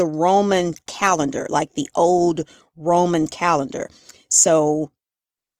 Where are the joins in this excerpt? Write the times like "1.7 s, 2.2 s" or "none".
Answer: none